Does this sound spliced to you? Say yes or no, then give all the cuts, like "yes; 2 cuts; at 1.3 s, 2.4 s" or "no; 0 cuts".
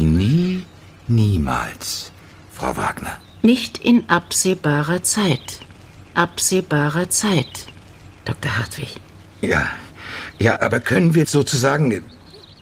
yes; 3 cuts; at 6.1 s, 10.6 s, 11.2 s